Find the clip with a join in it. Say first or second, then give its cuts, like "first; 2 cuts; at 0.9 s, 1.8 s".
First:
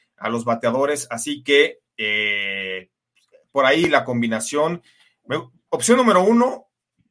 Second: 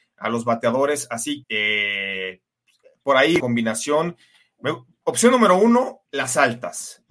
second; 3 cuts; at 1.4 s, 3.4 s, 6.1 s